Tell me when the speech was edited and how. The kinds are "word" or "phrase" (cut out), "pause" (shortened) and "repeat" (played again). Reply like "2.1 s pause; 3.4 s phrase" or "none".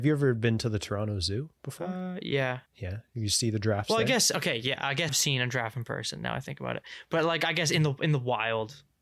2.7 s pause; 5.1 s phrase